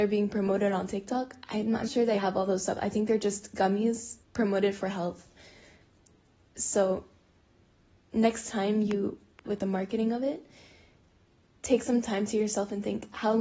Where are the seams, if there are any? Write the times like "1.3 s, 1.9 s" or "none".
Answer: 1.8 s, 2.2 s, 4.2 s, 9.4 s